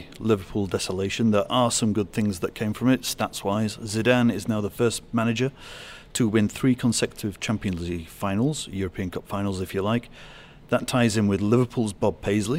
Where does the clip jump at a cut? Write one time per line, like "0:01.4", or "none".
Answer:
none